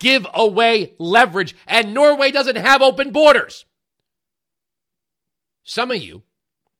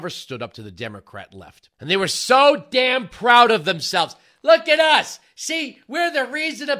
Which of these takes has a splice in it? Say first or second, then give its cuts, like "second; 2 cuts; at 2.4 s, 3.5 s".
second; 1 cut; at 1.7 s